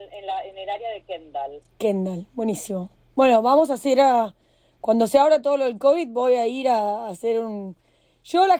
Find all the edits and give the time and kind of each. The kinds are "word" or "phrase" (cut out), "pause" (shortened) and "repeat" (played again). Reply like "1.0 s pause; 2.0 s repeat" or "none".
none